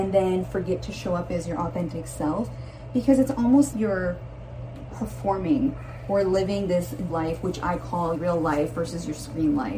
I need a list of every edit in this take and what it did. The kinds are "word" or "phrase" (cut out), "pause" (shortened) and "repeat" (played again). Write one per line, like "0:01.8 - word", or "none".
0:03.7 - word
0:07.1 - word
0:08.2 - word